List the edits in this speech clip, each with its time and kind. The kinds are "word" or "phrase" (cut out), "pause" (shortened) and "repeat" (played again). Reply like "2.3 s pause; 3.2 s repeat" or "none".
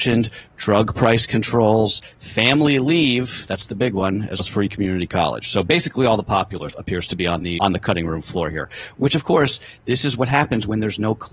4.4 s word; 6.7 s word; 7.6 s word